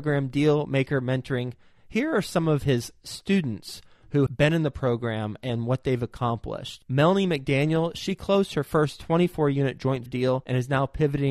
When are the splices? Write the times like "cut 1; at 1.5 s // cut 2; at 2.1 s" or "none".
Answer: cut 1; at 4.3 s // cut 2; at 10.1 s